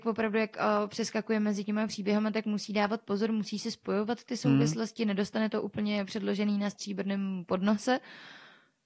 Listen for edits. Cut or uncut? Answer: uncut